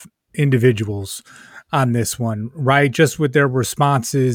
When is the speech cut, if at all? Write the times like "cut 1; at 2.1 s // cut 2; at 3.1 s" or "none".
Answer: none